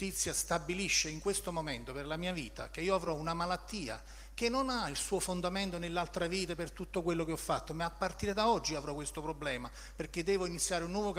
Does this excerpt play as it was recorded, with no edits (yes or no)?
yes